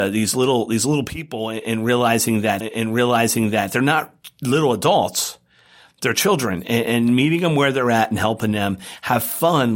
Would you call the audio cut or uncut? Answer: cut